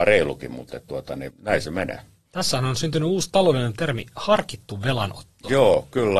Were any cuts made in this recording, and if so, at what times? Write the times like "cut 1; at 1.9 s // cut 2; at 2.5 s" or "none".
cut 1; at 1.3 s